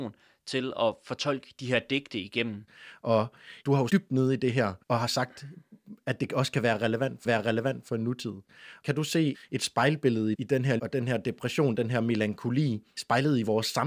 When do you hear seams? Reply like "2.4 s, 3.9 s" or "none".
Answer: 3.9 s, 4.8 s, 7.3 s, 9.3 s, 10.3 s, 10.8 s, 12.9 s